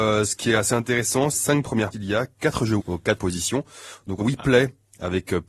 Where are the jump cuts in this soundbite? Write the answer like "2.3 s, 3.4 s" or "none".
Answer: 1.3 s, 1.9 s, 2.8 s, 3.2 s, 4.2 s